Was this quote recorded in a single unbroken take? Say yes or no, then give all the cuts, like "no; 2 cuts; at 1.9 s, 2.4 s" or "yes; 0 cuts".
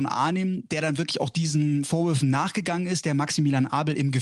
yes; 0 cuts